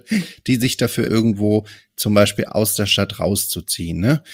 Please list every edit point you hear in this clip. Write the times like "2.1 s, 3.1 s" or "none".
1.1 s